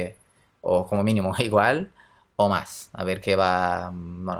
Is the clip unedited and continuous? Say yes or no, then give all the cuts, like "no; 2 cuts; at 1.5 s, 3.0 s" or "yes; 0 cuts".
yes; 0 cuts